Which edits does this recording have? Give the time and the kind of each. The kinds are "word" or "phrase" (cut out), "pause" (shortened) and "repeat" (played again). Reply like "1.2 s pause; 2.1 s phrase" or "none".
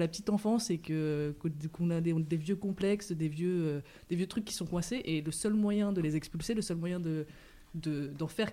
none